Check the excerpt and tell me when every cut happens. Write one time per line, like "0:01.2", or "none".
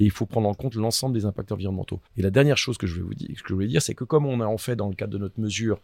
0:02.1